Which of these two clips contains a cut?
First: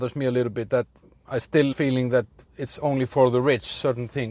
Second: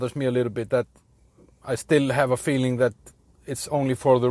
first; 3 cuts; at 1.0 s, 1.7 s, 2.5 s

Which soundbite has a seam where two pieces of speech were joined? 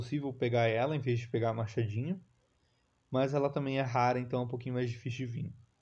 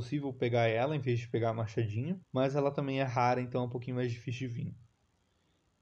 second; 1 cut; at 2.2 s

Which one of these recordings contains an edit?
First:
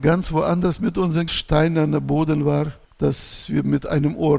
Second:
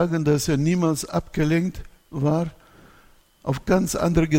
first; 2 cuts; at 1.3 s, 2.8 s

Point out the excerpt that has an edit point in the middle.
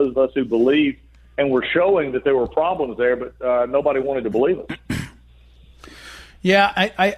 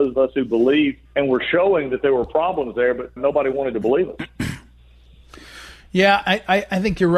second; 2 cuts; at 1.1 s, 3.2 s

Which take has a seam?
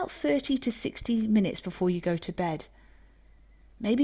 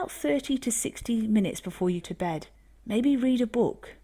second; 2 cuts; at 2.0 s, 2.6 s

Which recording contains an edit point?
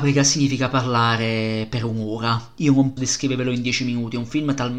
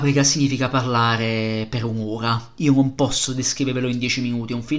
first; 1 cut; at 3.0 s

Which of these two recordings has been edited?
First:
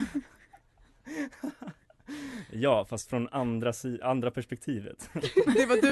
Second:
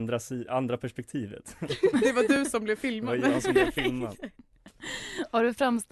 second; 1 cut; at 4.5 s

